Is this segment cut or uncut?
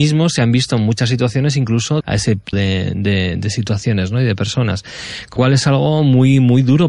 cut